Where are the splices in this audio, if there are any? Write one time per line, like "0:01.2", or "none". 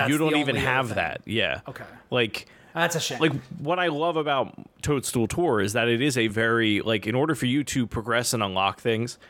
none

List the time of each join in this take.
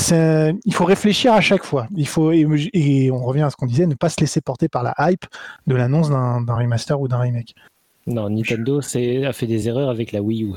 none

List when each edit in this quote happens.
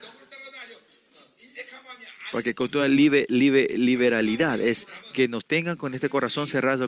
none

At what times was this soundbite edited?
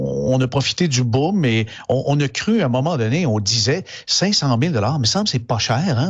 none

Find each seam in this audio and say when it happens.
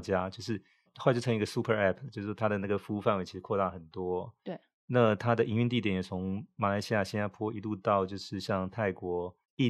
none

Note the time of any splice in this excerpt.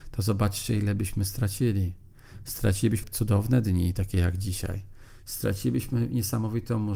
0:03.0

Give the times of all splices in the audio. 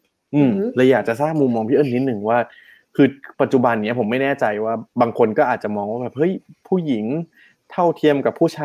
0:03.3

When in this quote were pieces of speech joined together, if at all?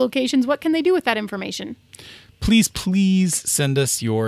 0:02.7

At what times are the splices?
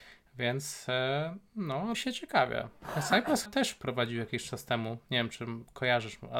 0:01.9
0:03.5

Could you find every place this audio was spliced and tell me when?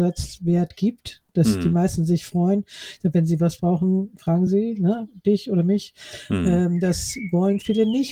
none

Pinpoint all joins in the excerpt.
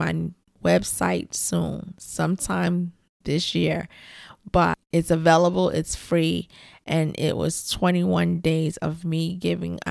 none

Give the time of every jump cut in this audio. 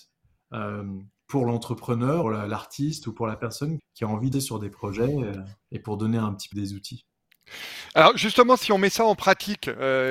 0:02.2
0:03.8
0:04.3
0:05.6
0:06.5

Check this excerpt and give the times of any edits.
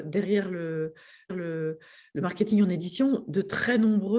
0:01.3

